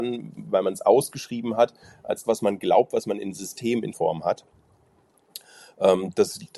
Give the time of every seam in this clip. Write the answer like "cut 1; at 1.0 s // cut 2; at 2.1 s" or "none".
cut 1; at 2.2 s // cut 2; at 3.9 s